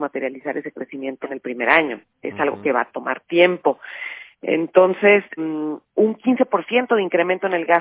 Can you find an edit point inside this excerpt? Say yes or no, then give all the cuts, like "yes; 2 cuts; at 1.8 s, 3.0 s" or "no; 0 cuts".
yes; 4 cuts; at 1.2 s, 2.1 s, 5.4 s, 5.9 s